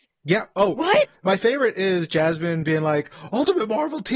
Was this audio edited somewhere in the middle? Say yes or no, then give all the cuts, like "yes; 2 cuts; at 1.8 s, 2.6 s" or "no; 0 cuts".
no; 0 cuts